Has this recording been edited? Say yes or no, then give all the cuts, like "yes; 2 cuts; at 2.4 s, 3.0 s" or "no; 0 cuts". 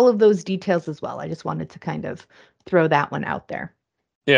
no; 0 cuts